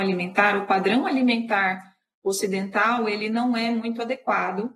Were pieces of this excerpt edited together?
no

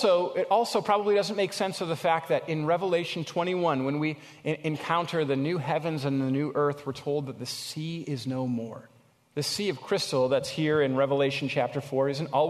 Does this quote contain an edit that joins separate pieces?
no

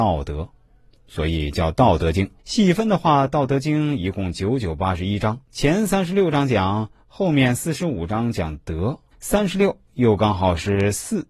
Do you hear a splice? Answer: yes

